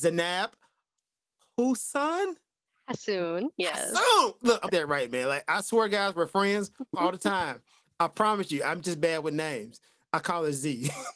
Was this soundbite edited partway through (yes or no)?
yes